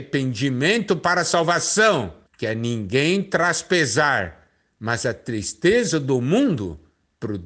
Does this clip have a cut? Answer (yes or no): yes